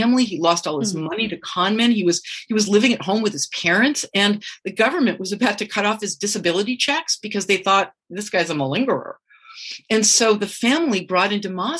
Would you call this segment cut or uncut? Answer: uncut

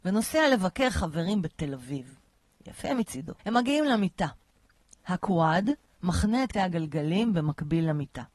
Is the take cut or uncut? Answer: cut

